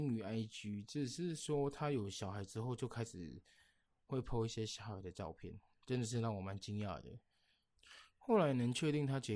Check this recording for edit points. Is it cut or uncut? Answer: uncut